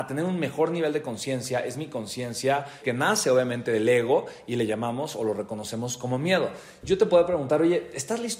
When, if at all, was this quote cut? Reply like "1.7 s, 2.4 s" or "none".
2.8 s